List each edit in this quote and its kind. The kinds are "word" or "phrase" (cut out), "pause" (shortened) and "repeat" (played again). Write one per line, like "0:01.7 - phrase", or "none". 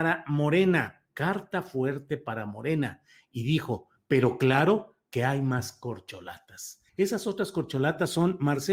0:01.1 - pause
0:06.9 - pause

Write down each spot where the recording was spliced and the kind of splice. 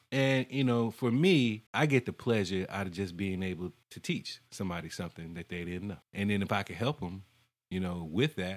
0:01.7 - pause
0:03.8 - pause
0:06.0 - pause

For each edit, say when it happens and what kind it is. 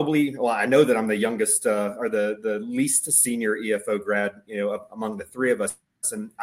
none

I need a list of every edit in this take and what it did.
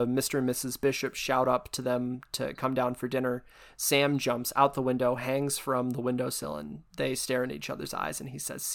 none

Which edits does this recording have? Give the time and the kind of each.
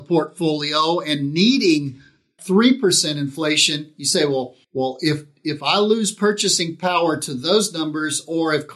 0:02.4 - word
0:04.6 - pause

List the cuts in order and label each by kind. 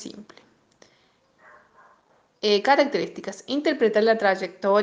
none

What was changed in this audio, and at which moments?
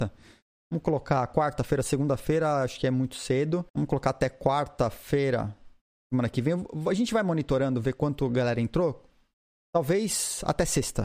0:03.7 - pause

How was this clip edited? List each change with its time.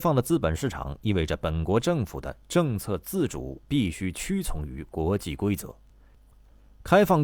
none

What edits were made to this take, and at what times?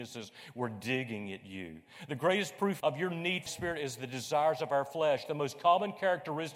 0:02.8 - word
0:03.5 - phrase

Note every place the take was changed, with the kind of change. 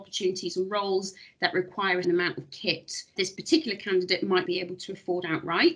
0:02.0 - word
0:03.2 - word
0:04.4 - word

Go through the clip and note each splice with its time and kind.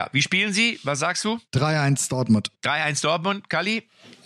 0:01.5 - pause
0:02.5 - pause

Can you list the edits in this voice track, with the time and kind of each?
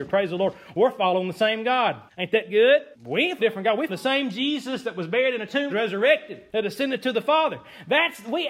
0:02.1 - pause
0:02.9 - pause
0:03.4 - word
0:03.9 - word
0:05.7 - phrase
0:06.5 - pause

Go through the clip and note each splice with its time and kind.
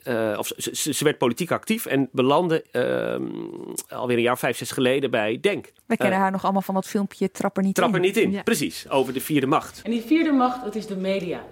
0:05.8 - pause

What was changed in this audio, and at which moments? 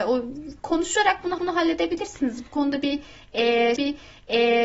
0:01.4 - repeat
0:03.8 - repeat

